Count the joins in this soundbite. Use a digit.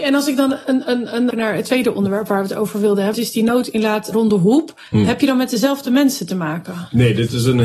4